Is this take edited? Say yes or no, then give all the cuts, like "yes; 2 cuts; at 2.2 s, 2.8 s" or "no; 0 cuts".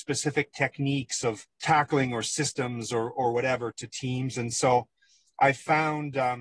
yes; 2 cuts; at 1.5 s, 3.7 s